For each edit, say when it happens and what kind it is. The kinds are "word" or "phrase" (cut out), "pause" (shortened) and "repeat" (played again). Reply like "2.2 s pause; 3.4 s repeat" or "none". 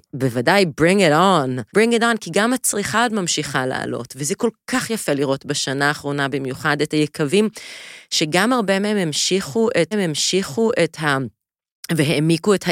1.7 s pause; 9.9 s repeat